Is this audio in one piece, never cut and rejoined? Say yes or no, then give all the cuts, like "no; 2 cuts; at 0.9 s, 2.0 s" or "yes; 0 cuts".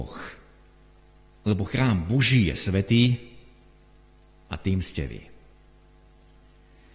yes; 0 cuts